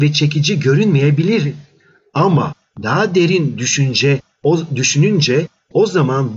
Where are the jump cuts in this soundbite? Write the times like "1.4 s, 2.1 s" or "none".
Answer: none

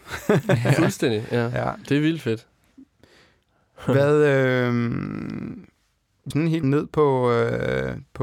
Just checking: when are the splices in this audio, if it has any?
6.3 s, 6.6 s

